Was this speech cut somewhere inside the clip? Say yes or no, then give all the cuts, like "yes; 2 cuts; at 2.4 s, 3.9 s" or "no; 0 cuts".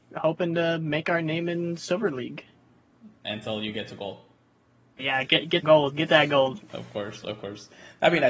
yes; 3 cuts; at 3.2 s, 5.0 s, 5.6 s